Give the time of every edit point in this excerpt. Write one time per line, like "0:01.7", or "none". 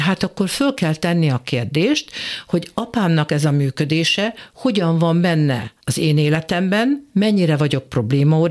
0:05.8